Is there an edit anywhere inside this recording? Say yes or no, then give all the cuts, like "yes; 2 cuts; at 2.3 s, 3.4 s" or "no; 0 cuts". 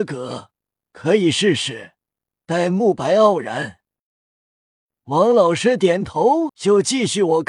yes; 1 cut; at 6.5 s